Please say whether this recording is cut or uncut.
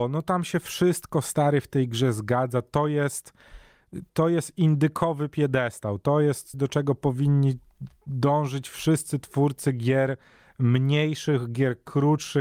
cut